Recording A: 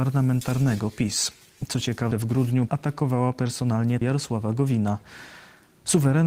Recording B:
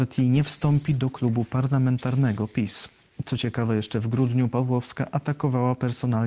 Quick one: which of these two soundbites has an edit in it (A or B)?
A